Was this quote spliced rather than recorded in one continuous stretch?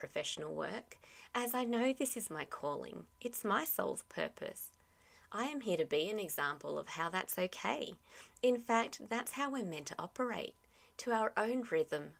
no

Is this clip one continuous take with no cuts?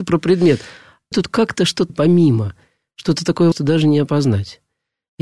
no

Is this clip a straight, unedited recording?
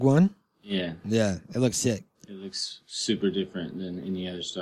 no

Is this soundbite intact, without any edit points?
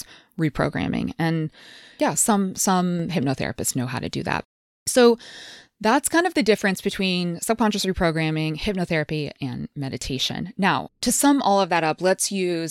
yes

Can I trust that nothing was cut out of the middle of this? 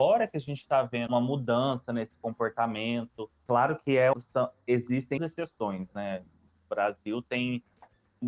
no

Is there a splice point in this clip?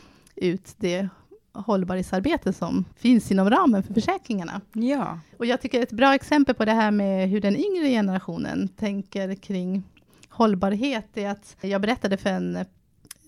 yes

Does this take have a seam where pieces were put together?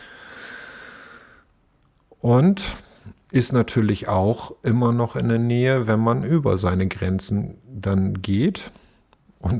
no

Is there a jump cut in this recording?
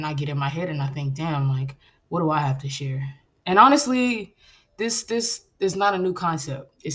yes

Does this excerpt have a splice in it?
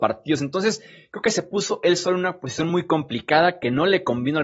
no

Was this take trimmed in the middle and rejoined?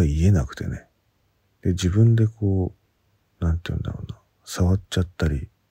no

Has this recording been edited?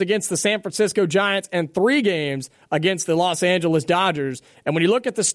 no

